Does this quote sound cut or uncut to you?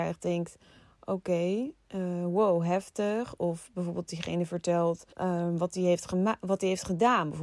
cut